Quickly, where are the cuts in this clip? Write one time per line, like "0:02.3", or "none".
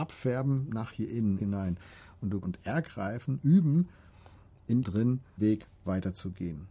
0:01.4
0:02.4
0:04.8
0:05.4